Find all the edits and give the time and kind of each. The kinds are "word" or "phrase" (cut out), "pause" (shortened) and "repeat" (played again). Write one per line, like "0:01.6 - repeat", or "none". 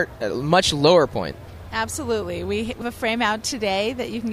0:01.1 - word
0:02.8 - word